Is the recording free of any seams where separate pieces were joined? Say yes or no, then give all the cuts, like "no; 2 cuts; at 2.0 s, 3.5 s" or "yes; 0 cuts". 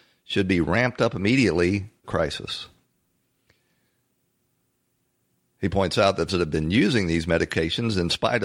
no; 2 cuts; at 2.0 s, 6.3 s